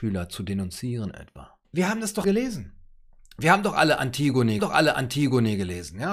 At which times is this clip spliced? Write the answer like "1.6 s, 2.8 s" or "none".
1.6 s, 2.2 s, 4.6 s